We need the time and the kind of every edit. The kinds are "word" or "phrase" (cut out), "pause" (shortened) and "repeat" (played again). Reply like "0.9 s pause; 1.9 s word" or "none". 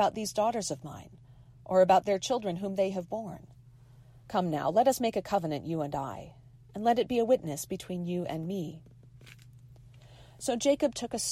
4.2 s pause